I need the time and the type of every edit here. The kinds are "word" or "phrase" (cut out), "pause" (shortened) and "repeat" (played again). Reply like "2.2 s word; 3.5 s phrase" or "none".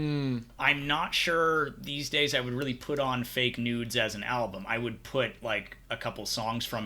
none